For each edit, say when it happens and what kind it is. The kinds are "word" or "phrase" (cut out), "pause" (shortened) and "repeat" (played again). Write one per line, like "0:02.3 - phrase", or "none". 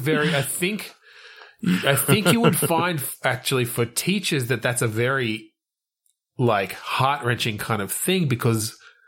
none